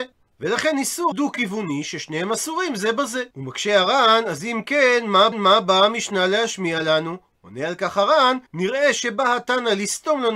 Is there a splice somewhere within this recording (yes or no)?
yes